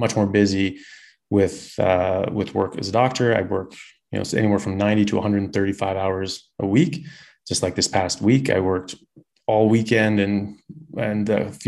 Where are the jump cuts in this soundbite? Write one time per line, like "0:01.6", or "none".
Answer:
none